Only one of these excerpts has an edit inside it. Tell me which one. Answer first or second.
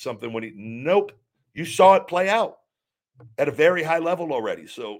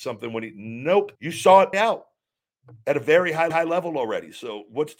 second